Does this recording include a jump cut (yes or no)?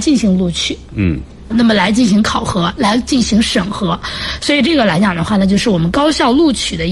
yes